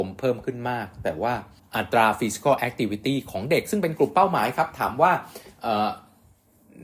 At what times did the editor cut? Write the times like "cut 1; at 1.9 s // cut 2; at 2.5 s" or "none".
cut 1; at 1.6 s